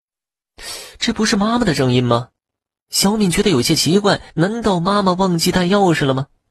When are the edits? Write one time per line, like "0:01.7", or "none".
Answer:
0:04.3